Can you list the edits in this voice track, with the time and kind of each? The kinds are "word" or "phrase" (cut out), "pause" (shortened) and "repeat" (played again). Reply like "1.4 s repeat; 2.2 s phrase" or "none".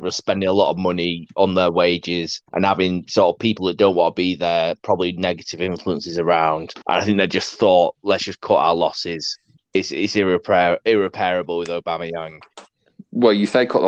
2.5 s pause; 6.8 s pause; 9.6 s pause